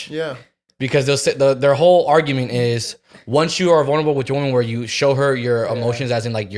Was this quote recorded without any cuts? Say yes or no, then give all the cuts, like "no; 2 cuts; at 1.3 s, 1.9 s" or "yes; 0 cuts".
yes; 0 cuts